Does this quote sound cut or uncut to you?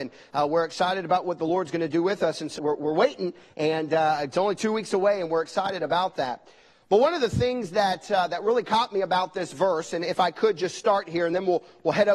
cut